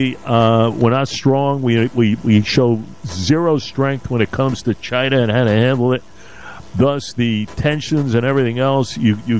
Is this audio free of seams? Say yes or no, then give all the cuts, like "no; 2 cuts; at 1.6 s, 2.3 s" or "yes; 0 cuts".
no; 1 cut; at 2.2 s